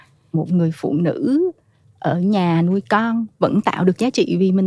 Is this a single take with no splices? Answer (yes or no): yes